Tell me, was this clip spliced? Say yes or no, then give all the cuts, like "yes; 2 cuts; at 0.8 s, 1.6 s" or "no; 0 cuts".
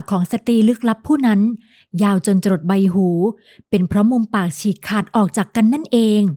no; 0 cuts